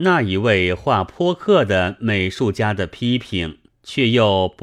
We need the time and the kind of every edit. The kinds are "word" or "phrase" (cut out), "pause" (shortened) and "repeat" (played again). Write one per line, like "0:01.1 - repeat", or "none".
0:03.7 - pause